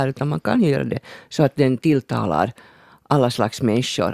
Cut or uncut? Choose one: uncut